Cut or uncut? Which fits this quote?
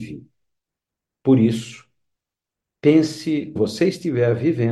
cut